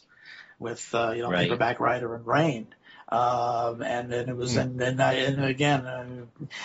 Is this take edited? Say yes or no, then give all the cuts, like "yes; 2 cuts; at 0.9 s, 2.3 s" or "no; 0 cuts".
no; 0 cuts